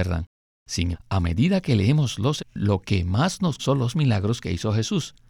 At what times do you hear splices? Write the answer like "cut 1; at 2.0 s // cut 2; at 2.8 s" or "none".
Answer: cut 1; at 0.9 s // cut 2; at 2.4 s // cut 3; at 3.6 s